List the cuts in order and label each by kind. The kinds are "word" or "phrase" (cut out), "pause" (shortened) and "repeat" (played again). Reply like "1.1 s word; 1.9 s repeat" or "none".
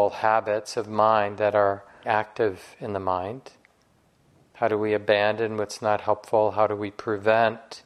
2.0 s word